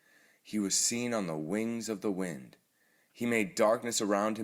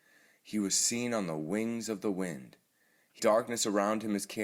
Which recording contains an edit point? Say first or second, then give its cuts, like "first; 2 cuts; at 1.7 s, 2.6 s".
second; 1 cut; at 3.2 s